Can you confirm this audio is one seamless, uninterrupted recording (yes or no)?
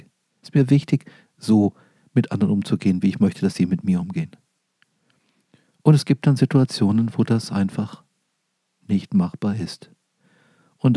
yes